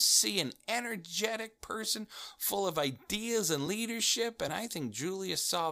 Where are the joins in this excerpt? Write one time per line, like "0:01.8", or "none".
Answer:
none